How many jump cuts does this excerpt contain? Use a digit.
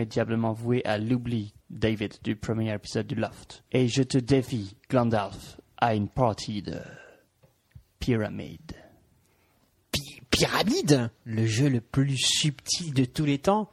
4